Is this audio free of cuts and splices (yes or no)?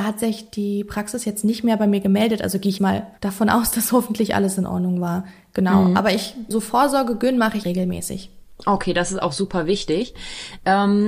no